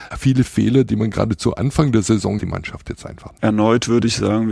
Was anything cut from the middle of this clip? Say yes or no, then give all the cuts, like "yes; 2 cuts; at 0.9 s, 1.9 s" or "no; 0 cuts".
yes; 1 cut; at 2.4 s